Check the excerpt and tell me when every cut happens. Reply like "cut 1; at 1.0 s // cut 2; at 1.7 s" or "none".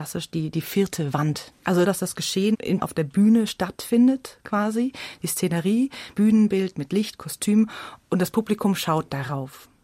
cut 1; at 2.8 s // cut 2; at 6.1 s